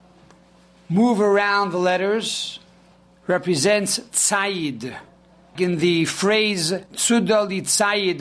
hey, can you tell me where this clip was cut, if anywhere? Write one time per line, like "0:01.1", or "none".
0:02.9
0:05.5
0:06.9